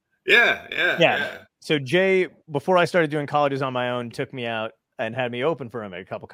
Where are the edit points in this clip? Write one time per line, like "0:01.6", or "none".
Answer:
0:04.1